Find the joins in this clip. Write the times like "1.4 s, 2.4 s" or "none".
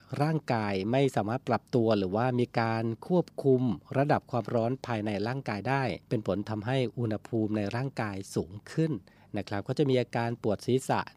6.0 s, 9.2 s